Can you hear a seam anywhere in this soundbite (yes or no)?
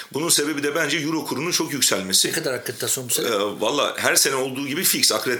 no